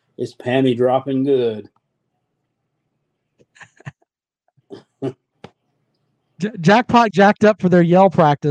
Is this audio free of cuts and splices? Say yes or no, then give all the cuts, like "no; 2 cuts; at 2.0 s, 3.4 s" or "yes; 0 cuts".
no; 1 cut; at 7.1 s